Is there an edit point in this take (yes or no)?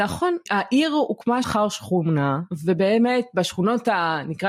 yes